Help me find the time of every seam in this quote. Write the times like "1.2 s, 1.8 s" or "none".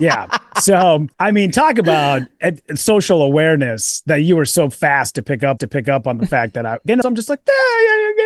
1.1 s, 5.6 s, 7.0 s